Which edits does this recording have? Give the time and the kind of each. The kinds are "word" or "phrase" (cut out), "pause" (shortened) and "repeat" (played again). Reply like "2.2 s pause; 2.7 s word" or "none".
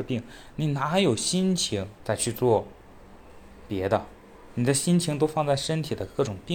2.0 s pause